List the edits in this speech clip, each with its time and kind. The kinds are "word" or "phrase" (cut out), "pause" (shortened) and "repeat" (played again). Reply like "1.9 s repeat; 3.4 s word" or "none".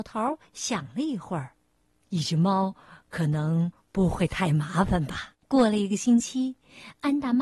1.8 s pause; 5.4 s pause